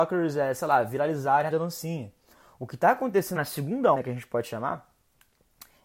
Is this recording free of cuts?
no; 3 cuts; at 1.5 s, 3.4 s, 3.9 s

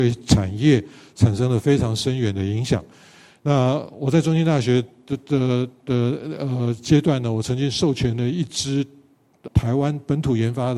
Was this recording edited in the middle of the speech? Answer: yes; 1 cut; at 9.5 s

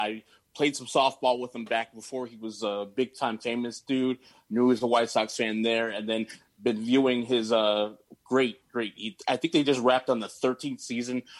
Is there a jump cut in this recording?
no; 0 cuts

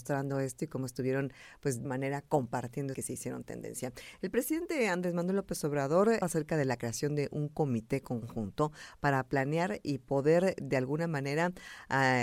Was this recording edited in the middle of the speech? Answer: yes; 3 cuts; at 1.8 s, 2.9 s, 6.2 s

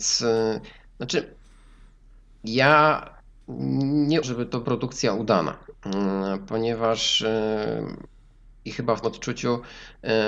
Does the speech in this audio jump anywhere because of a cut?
yes; 3 cuts; at 4.2 s, 4.6 s, 9.0 s

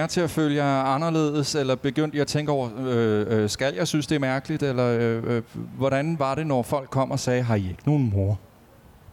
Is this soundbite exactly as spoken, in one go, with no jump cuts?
yes; 0 cuts

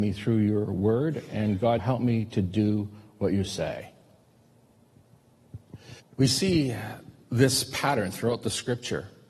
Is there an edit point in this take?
yes; 2 cuts; at 1.8 s, 6.0 s

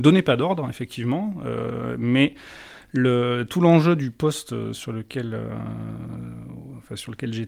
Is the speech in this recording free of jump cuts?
yes; 0 cuts

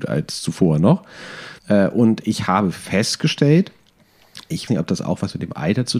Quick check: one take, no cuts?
no; 2 cuts; at 1.6 s, 4.7 s

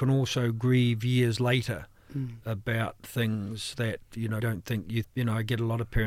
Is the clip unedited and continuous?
no; 2 cuts; at 4.4 s, 5.0 s

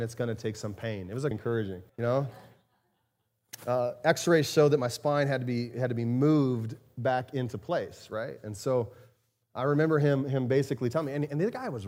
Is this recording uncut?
no; 2 cuts; at 1.3 s, 1.9 s

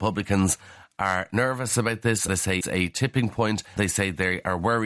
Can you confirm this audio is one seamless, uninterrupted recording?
no; 3 cuts; at 2.3 s, 2.6 s, 3.8 s

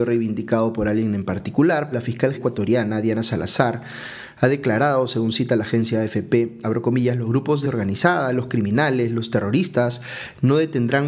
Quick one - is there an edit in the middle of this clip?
yes; 4 cuts; at 1.9 s, 2.3 s, 6.6 s, 7.6 s

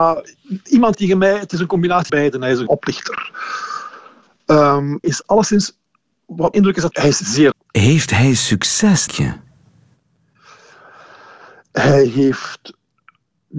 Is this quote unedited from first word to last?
no; 8 cuts; at 0.9 s, 2.1 s, 2.7 s, 5.0 s, 6.5 s, 6.9 s, 7.5 s, 9.1 s

